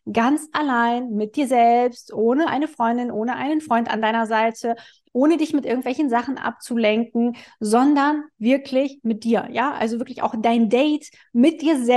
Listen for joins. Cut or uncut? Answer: uncut